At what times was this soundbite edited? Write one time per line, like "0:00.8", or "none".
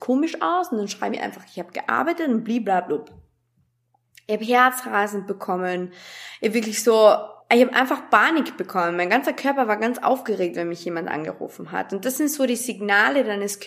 0:07.4